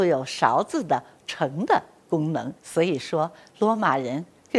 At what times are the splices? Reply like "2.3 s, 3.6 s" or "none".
2.6 s